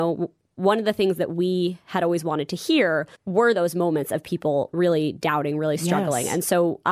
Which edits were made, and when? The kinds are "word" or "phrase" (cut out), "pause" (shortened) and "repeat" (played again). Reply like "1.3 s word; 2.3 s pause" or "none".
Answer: 3.1 s pause